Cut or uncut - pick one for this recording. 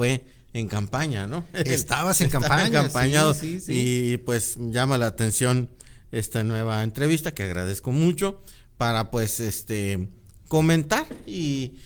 uncut